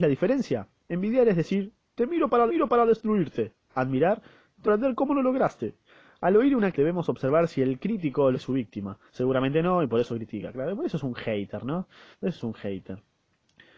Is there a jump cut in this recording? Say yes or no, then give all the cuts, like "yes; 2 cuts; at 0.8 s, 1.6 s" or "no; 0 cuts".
yes; 7 cuts; at 2.5 s, 4.6 s, 5.8 s, 6.7 s, 8.3 s, 9.1 s, 12.1 s